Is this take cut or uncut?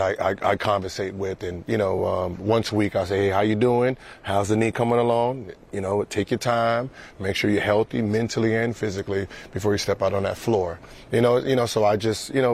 uncut